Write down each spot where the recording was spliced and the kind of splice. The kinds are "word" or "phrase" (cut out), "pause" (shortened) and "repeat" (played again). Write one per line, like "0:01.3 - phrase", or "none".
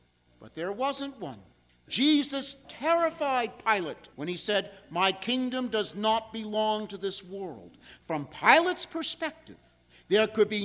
0:01.7 - pause
0:04.1 - pause